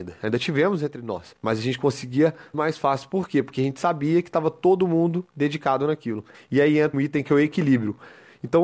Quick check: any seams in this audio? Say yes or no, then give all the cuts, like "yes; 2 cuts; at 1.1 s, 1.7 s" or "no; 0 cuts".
yes; 5 cuts; at 1.4 s, 2.5 s, 5.3 s, 6.3 s, 6.9 s